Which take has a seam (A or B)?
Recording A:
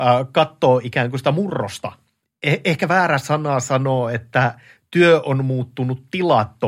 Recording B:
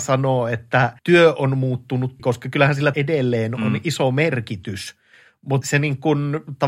B